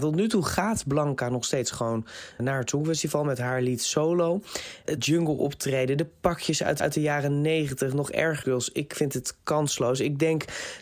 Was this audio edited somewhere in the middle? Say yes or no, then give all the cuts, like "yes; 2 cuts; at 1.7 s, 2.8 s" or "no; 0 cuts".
yes; 4 cuts; at 2.4 s, 5.0 s, 6.8 s, 8.4 s